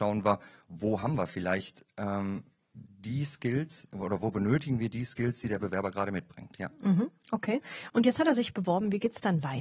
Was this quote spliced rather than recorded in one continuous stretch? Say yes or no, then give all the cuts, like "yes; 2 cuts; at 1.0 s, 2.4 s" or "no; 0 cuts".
no; 0 cuts